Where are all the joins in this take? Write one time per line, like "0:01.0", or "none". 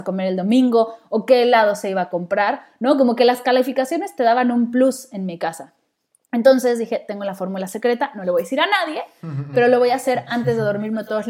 none